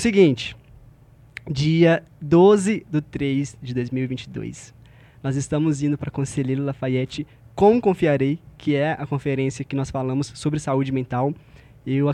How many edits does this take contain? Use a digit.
0